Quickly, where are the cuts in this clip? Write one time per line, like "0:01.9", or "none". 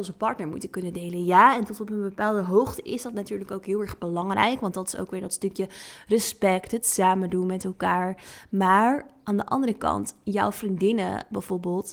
none